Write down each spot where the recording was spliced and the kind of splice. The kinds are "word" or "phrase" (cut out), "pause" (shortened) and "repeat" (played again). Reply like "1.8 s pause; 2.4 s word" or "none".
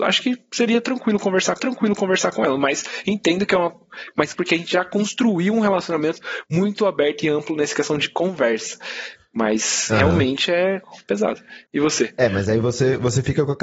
1.6 s repeat; 4.3 s phrase; 11.7 s pause